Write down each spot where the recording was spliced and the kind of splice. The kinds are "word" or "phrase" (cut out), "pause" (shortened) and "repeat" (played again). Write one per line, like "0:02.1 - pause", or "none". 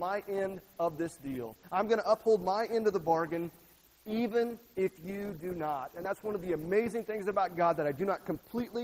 none